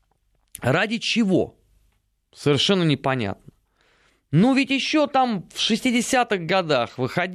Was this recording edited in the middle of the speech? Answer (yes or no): no